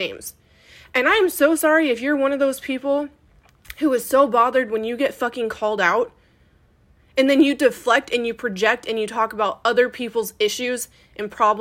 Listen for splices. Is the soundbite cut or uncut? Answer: uncut